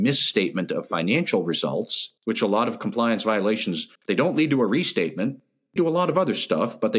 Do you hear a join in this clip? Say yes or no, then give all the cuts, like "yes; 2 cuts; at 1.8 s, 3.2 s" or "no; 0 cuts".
yes; 3 cuts; at 2.2 s, 4.0 s, 5.8 s